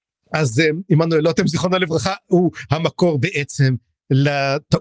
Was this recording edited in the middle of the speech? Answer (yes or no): no